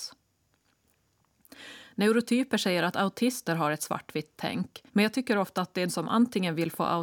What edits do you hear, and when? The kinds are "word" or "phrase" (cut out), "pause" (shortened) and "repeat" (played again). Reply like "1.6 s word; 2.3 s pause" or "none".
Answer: 4.9 s pause; 5.9 s word

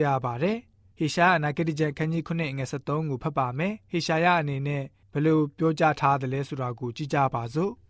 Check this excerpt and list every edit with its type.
5.0 s pause

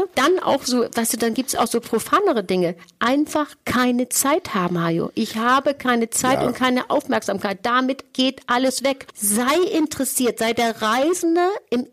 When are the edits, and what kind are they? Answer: none

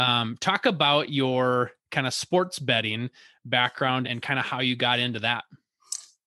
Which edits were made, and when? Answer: 4.0 s word

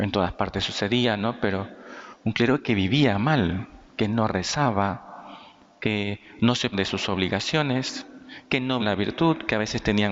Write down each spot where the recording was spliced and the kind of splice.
3.9 s pause; 6.7 s word; 8.8 s word

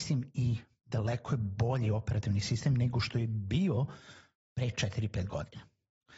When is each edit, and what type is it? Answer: none

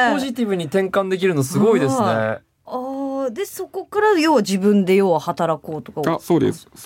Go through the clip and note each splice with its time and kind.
none

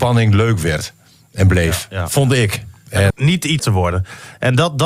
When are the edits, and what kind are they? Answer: 3.1 s word; 3.6 s word

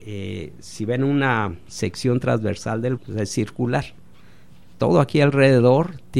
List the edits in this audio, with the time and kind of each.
3.0 s word

